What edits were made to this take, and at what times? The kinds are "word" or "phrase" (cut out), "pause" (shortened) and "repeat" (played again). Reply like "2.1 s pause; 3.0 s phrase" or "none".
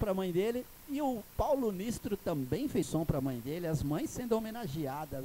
2.8 s word